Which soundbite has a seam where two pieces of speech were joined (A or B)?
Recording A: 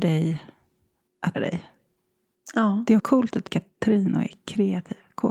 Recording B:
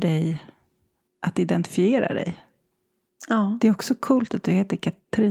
A